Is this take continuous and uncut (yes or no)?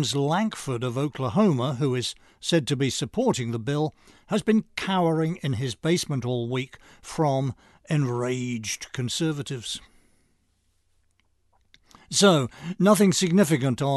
yes